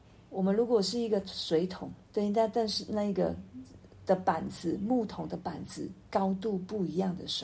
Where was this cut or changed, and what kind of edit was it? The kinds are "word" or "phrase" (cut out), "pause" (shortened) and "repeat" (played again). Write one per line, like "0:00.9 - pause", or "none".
0:02.0 - pause